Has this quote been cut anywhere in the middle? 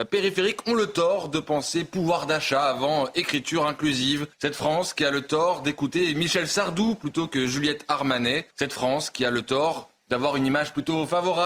yes; 2 cuts; at 4.3 s, 8.5 s

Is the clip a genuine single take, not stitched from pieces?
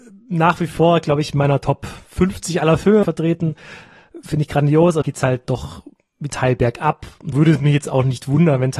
no; 5 cuts; at 3.0 s, 5.0 s, 5.4 s, 6.3 s, 7.3 s

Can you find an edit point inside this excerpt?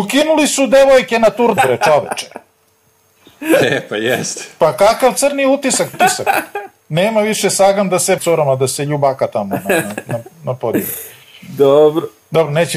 yes; 3 cuts; at 1.6 s, 5.9 s, 8.2 s

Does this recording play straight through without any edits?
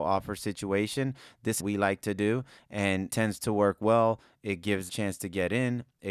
no; 3 cuts; at 1.6 s, 3.1 s, 4.9 s

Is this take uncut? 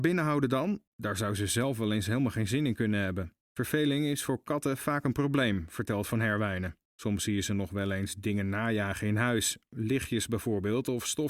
no; 3 cuts; at 0.9 s, 3.4 s, 6.8 s

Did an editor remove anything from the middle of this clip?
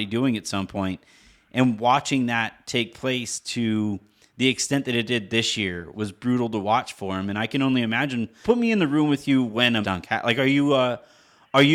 yes; 3 cuts; at 5.9 s, 8.4 s, 9.8 s

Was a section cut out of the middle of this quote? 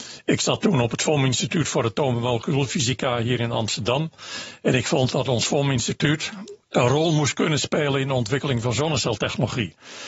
yes; 1 cut; at 6.6 s

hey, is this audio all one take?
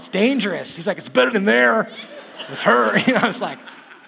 no; 1 cut; at 1.3 s

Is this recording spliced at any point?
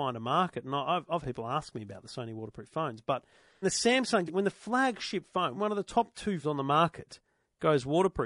yes; 5 cuts; at 1.2 s, 3.6 s, 4.3 s, 5.5 s, 6.4 s

